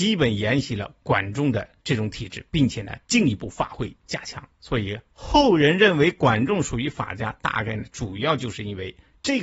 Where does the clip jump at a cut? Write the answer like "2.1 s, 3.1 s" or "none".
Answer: 4.5 s

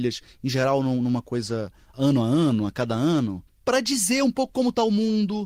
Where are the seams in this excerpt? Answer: none

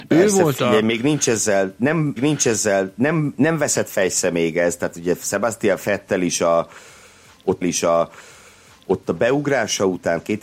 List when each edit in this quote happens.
2.2 s, 7.6 s

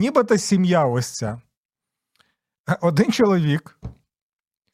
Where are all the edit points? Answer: none

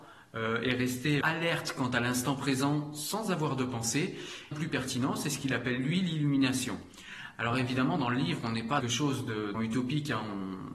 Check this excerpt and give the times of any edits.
1.2 s, 4.5 s, 8.8 s, 9.5 s

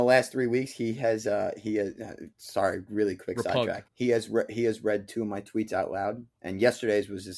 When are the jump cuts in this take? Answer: 2.3 s, 3.9 s

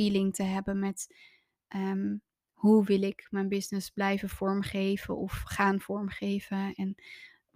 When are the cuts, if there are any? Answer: none

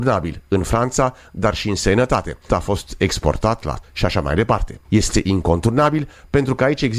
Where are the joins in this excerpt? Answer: 2.5 s, 3.8 s, 4.8 s

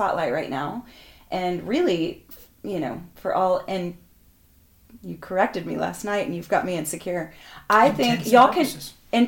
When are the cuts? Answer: none

